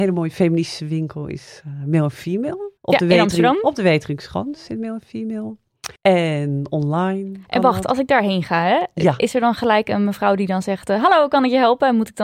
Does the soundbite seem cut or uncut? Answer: cut